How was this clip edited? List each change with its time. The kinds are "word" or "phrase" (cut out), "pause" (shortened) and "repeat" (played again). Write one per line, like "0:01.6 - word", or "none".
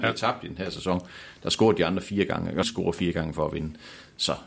0:02.6 - word